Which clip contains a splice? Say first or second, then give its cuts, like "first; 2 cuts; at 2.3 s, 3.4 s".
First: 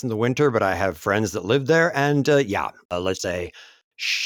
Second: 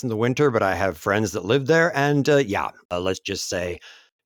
first; 1 cut; at 3.2 s